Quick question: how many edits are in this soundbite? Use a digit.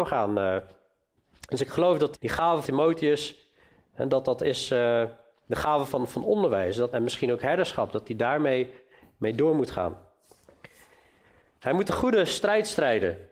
4